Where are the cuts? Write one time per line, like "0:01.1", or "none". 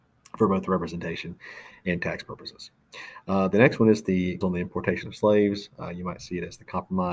0:04.4